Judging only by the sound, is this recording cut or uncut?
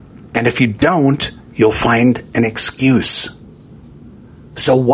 uncut